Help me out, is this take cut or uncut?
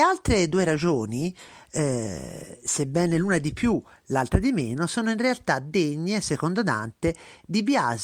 uncut